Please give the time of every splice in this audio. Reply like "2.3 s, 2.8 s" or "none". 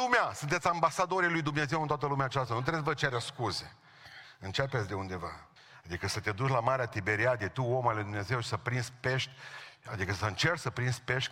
5.6 s